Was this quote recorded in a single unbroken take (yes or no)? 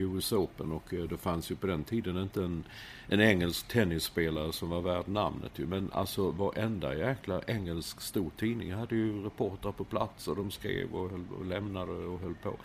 yes